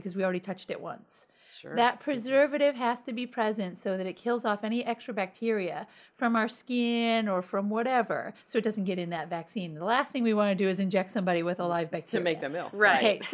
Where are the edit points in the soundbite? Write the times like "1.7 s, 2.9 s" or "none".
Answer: 8.4 s